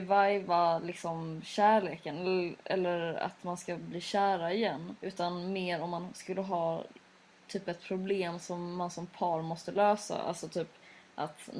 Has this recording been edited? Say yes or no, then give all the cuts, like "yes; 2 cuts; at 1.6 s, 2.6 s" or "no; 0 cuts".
yes; 1 cut; at 5.0 s